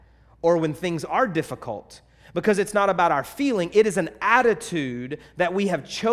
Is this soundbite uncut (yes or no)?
yes